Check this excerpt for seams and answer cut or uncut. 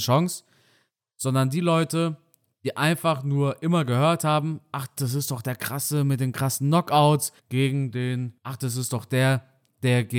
cut